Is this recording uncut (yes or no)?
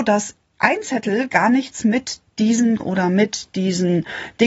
no